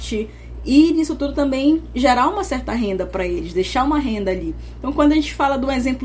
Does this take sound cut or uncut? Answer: uncut